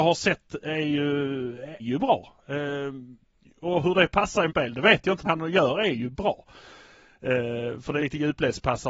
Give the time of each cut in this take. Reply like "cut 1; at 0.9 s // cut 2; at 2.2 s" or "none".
cut 1; at 1.8 s // cut 2; at 3.4 s // cut 3; at 4.5 s // cut 4; at 5.2 s // cut 5; at 8.0 s